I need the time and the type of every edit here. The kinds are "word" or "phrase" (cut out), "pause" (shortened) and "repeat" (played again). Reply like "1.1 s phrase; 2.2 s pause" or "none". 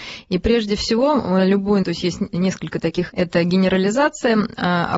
1.8 s word; 3.1 s word